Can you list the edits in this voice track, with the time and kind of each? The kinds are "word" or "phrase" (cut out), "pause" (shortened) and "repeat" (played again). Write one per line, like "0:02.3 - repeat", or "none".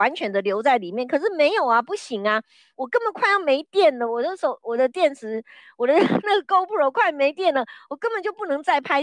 none